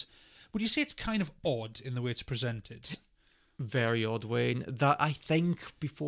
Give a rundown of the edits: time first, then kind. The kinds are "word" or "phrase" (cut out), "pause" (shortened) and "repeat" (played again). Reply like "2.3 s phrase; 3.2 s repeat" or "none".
none